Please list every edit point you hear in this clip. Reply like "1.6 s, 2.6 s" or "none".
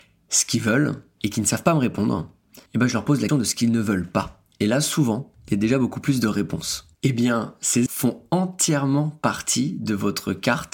1.1 s, 2.7 s, 3.3 s, 6.9 s, 7.9 s

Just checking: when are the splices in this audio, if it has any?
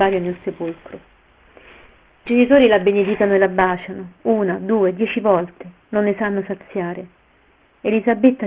2.3 s

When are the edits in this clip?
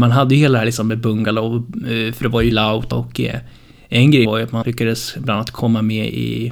2.5 s, 2.9 s, 4.3 s, 4.6 s

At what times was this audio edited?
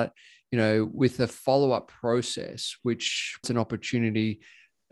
3.4 s

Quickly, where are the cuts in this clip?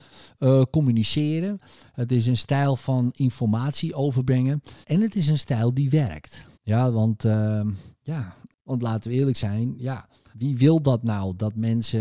4.8 s, 6.5 s, 10.3 s

